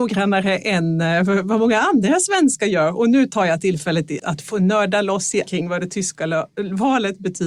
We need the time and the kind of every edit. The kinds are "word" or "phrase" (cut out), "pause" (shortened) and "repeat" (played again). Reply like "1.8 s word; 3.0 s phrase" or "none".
4.2 s word; 5.5 s word

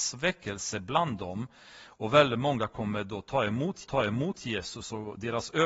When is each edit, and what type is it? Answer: 3.8 s repeat

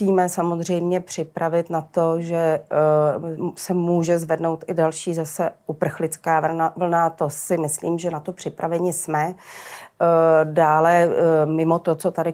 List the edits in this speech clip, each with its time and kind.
none

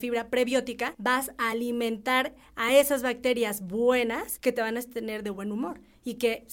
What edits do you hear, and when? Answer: none

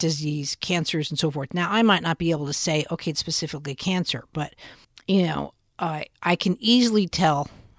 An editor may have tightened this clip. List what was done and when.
4.8 s pause

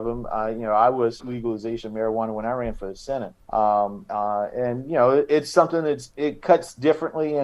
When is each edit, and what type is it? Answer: 1.2 s word; 3.4 s pause

